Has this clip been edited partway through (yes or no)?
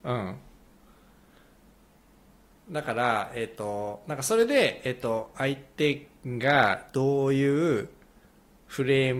no